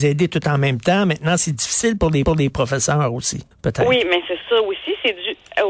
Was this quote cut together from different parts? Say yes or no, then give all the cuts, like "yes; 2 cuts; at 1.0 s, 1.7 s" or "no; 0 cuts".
yes; 4 cuts; at 1.4 s, 2.3 s, 3.5 s, 4.4 s